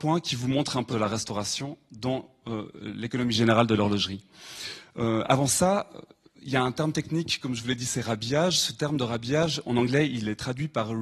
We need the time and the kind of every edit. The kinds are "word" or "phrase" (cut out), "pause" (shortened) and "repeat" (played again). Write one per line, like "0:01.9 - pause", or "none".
0:00.9 - phrase